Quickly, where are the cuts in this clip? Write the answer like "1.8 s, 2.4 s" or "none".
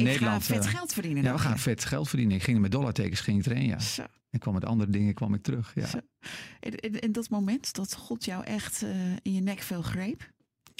7.7 s

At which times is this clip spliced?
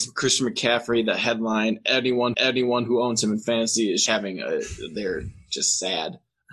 2.3 s, 4.1 s

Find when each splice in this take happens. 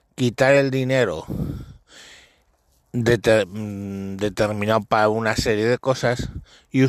none

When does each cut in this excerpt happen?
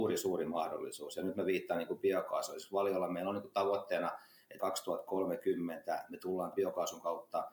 4.6 s, 6.5 s

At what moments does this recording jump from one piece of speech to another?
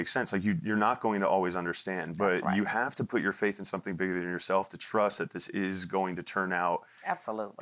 none

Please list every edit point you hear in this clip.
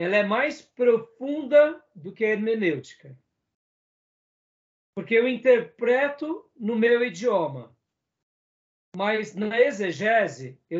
none

